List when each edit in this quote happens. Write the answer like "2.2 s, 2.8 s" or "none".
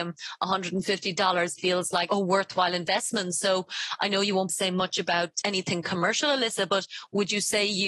1.6 s, 2.1 s, 4.5 s, 5.4 s